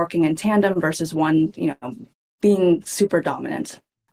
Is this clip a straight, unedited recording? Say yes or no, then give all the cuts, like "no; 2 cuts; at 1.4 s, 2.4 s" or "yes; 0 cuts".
yes; 0 cuts